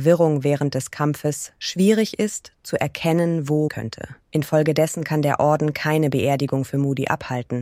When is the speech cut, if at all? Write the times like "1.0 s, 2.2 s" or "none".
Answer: 3.7 s, 4.2 s